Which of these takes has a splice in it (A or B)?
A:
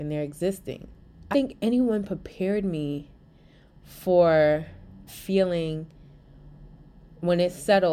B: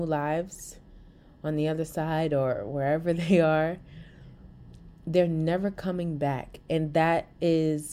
A